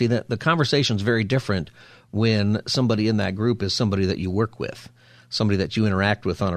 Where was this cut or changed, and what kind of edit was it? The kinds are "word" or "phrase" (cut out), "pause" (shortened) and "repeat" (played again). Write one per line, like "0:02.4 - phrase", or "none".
none